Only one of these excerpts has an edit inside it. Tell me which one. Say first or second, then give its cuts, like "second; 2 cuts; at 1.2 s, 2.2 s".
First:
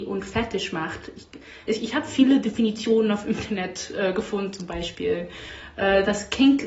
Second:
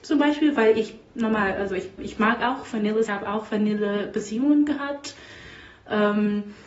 second; 2 cuts; at 2.0 s, 3.1 s